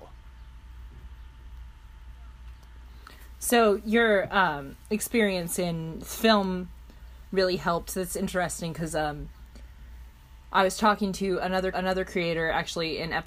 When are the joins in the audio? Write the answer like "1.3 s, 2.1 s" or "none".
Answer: 11.7 s